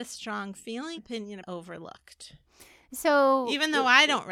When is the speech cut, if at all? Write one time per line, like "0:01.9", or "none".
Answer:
0:01.0
0:01.4